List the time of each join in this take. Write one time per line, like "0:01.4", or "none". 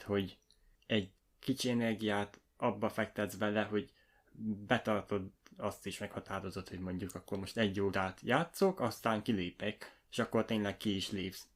0:01.3